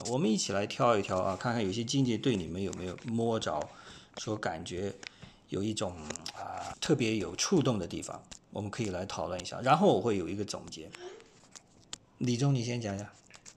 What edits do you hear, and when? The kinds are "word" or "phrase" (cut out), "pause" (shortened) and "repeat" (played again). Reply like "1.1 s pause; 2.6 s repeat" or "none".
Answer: 6.7 s word; 12.0 s pause